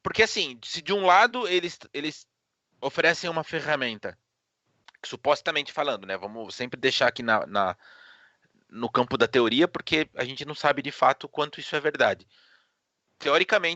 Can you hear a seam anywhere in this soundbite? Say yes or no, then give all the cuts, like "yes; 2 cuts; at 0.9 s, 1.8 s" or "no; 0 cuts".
no; 0 cuts